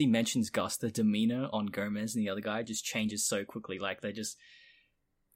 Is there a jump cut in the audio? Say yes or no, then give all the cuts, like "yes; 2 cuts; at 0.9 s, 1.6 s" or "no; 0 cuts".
no; 0 cuts